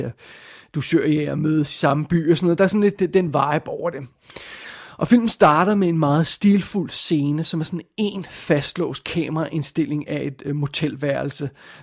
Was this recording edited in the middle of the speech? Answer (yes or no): no